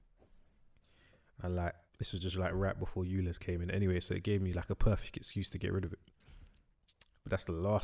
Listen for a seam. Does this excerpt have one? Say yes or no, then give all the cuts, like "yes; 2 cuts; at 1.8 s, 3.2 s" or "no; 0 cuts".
no; 0 cuts